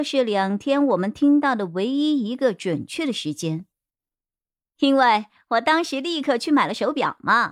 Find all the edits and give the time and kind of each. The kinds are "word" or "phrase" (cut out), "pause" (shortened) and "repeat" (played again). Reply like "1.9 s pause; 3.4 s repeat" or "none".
none